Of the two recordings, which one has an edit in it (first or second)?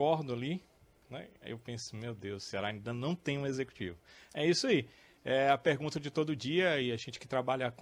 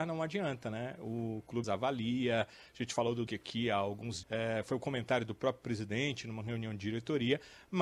second